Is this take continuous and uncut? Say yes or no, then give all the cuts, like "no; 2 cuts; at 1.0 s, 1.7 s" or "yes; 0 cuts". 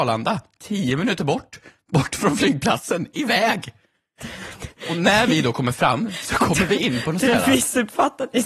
yes; 0 cuts